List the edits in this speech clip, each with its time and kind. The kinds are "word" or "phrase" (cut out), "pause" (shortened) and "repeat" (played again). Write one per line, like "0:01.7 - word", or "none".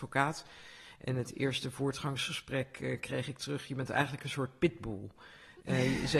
none